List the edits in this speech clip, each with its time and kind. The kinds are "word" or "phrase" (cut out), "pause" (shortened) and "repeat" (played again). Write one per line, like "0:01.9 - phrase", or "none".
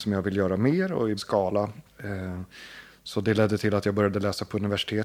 0:01.2 - word
0:01.9 - pause

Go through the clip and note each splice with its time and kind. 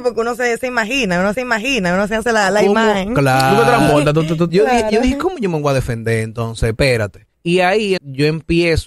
0:01.3 - repeat
0:07.3 - pause
0:08.0 - word

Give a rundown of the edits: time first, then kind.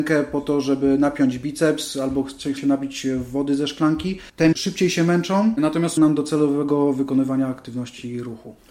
0:02.6 - word
0:04.5 - word
0:06.0 - word

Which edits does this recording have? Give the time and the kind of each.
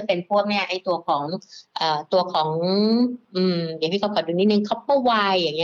0:03.2 - pause

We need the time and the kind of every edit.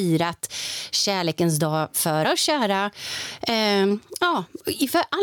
0:02.2 - word

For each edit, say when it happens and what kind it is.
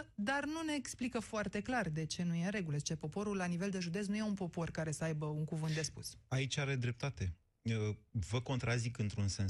none

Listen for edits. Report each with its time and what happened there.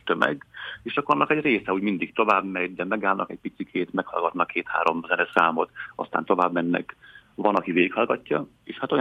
none

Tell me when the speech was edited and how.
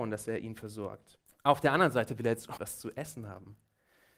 0:01.3 - pause
0:02.6 - word

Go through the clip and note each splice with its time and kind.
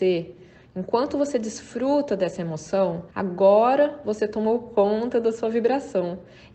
0:03.1 - pause

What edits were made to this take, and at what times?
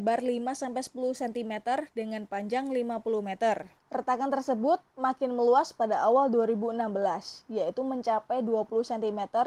0:03.8 - pause

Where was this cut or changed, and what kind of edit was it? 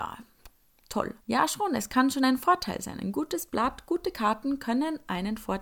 0:01.2 - pause

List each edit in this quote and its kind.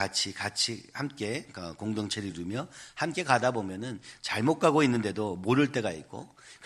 none

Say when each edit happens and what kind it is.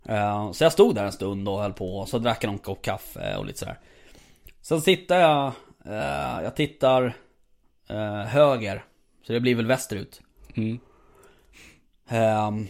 none

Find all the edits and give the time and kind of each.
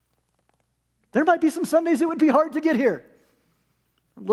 none

